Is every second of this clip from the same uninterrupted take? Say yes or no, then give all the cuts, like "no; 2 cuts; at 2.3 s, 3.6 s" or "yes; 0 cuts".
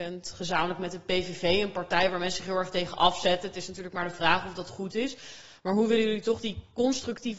yes; 0 cuts